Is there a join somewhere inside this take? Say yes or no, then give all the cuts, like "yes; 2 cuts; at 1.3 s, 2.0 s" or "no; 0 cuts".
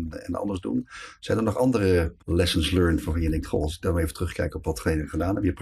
yes; 1 cut; at 2.2 s